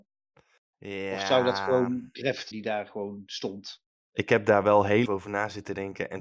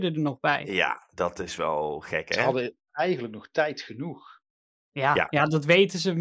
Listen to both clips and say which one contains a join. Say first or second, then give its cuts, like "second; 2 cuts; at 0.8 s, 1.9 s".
first; 2 cuts; at 2.5 s, 5.1 s